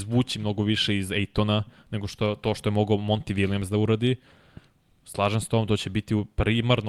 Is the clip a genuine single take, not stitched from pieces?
yes; 0 cuts

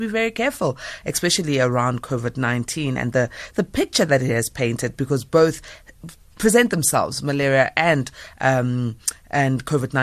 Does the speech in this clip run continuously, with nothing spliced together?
yes; 0 cuts

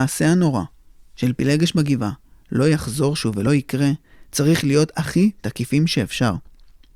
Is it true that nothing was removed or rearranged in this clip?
yes; 0 cuts

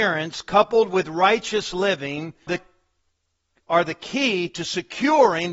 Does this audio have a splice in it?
yes; 1 cut; at 2.5 s

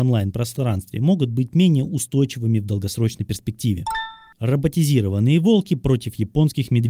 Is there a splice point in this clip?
no; 0 cuts

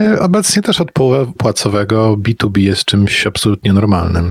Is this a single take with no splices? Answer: no; 1 cut; at 1.4 s

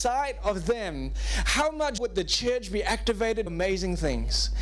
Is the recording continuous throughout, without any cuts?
no; 2 cuts; at 2.0 s, 3.5 s

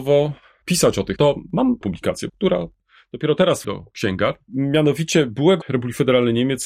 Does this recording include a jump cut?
yes; 5 cuts; at 1.2 s, 1.8 s, 2.3 s, 3.6 s, 5.6 s

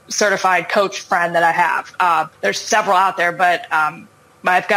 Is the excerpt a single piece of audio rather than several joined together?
no; 1 cut; at 2.3 s

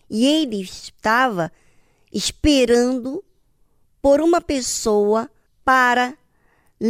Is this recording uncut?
yes; 0 cuts

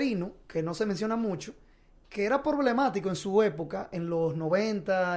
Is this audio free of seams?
yes; 0 cuts

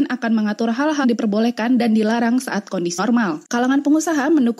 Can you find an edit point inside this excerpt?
yes; 3 cuts; at 1.0 s, 3.0 s, 3.4 s

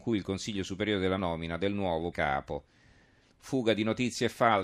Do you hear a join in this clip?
yes; 2 cuts; at 1.2 s, 2.1 s

